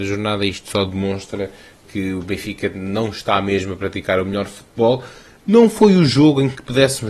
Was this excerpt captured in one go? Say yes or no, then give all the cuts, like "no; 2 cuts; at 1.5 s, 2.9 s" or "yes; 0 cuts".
yes; 0 cuts